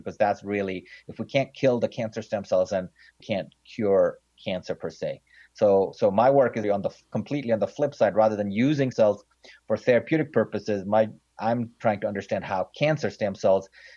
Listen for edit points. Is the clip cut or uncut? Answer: cut